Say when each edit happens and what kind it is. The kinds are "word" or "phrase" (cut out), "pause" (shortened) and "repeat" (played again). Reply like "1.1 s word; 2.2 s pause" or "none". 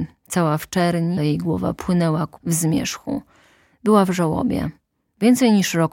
1.2 s word; 2.4 s word